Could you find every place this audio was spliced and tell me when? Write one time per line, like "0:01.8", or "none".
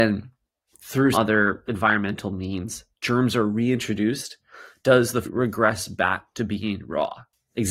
0:01.1
0:05.2